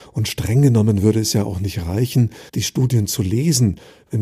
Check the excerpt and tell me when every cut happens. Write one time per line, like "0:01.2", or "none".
0:02.5